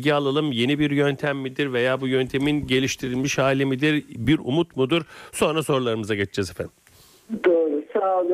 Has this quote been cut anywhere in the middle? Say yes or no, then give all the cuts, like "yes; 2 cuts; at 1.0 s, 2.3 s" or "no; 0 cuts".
no; 0 cuts